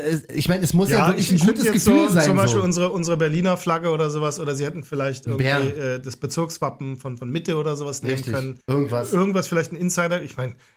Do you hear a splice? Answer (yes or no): yes